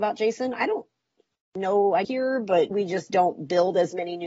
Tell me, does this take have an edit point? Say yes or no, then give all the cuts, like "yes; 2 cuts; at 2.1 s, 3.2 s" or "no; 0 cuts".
yes; 2 cuts; at 2.0 s, 2.7 s